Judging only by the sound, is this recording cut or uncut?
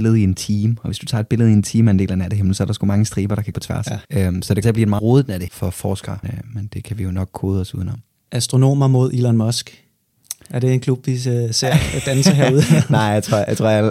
cut